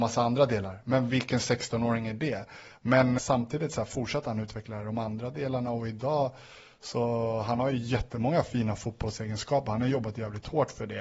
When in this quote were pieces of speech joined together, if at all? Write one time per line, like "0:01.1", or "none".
0:03.2